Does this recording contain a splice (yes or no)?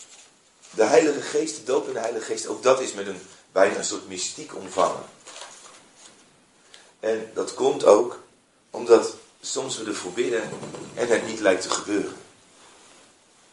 no